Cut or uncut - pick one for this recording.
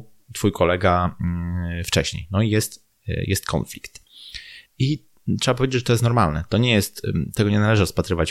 cut